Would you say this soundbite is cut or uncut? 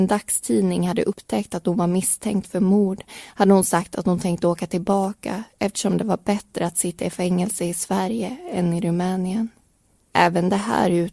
uncut